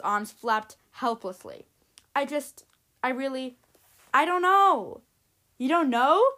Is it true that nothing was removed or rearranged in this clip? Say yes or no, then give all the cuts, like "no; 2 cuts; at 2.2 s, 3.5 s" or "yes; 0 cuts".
yes; 0 cuts